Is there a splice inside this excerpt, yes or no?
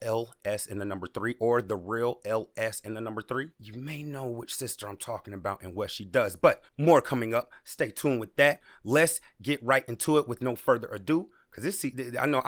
yes